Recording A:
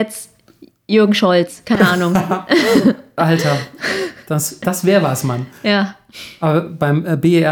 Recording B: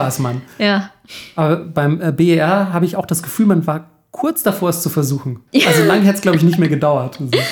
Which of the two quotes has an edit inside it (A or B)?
B